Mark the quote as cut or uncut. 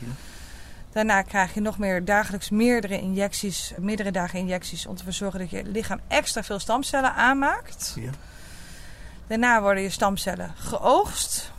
cut